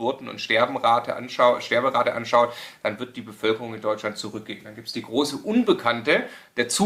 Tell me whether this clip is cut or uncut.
uncut